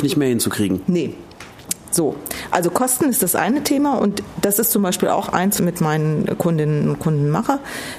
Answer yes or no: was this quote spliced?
yes